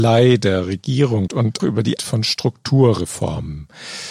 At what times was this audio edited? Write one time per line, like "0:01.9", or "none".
0:01.3
0:01.6
0:02.0